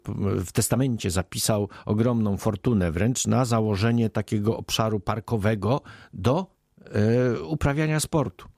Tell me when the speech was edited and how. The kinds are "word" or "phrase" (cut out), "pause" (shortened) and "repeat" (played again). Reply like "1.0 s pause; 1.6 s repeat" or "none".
none